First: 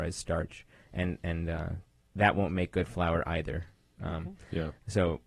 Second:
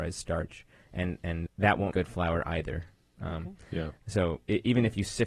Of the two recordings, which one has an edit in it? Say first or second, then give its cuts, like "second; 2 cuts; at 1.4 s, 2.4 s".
second; 2 cuts; at 1.5 s, 1.9 s